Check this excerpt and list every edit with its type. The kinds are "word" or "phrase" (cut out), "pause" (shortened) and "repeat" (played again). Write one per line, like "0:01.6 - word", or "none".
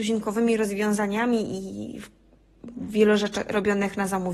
none